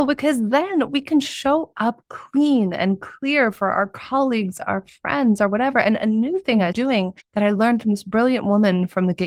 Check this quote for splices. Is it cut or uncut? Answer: cut